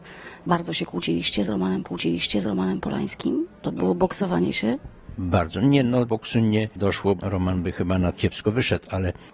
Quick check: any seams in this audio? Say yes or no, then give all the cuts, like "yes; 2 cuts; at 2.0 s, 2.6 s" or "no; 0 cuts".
yes; 4 cuts; at 1.8 s, 6.1 s, 7.2 s, 8.1 s